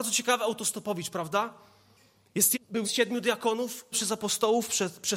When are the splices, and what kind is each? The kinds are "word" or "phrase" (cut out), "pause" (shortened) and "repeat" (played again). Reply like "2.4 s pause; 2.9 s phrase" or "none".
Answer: 2.5 s word; 2.8 s word; 3.9 s word